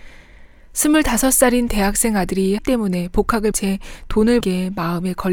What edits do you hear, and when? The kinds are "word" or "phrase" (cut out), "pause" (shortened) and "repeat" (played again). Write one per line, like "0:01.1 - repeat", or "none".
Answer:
0:02.6 - word
0:03.5 - word
0:04.4 - phrase